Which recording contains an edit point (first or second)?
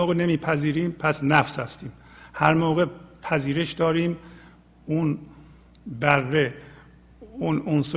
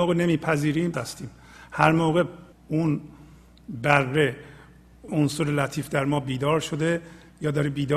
second